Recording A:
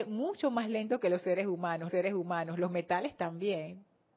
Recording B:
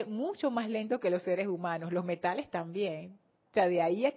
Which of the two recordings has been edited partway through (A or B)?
A